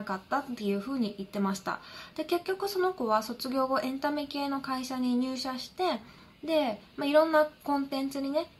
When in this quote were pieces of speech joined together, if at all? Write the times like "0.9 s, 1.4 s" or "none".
none